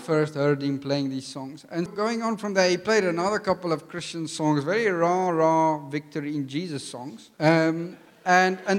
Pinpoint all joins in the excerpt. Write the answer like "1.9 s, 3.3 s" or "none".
1.9 s, 7.3 s